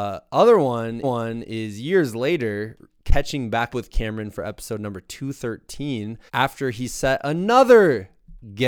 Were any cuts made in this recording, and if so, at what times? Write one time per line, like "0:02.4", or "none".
0:01.0
0:03.7
0:06.3